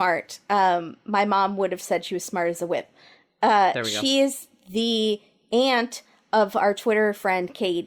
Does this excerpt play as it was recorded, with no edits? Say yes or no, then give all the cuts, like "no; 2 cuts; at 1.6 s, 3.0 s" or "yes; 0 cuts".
yes; 0 cuts